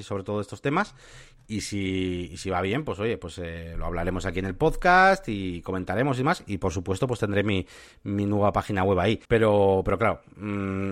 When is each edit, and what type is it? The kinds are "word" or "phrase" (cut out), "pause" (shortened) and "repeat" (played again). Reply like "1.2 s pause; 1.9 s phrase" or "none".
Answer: 9.2 s pause